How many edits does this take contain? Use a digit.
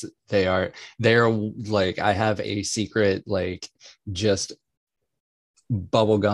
0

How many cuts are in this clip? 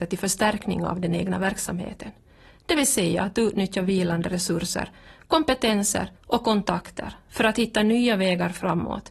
1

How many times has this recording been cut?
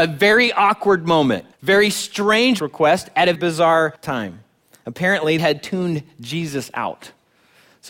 5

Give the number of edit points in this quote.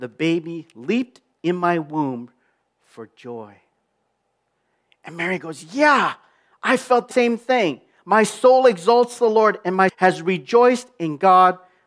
2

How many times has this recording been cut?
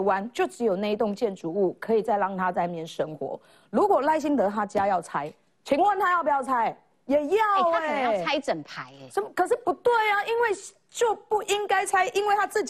0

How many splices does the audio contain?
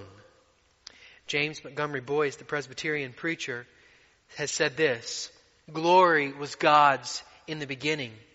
0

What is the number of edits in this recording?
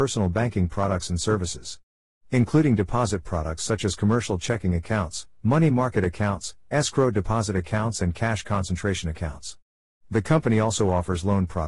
0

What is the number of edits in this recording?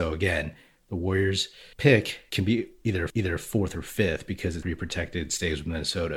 3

